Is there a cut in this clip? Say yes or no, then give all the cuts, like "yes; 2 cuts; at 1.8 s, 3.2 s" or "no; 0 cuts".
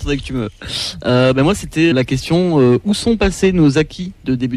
yes; 1 cut; at 1.9 s